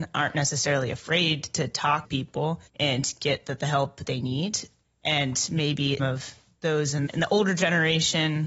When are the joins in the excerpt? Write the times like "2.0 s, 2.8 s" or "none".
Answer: 2.0 s, 2.7 s, 4.0 s, 4.8 s, 6.0 s, 7.1 s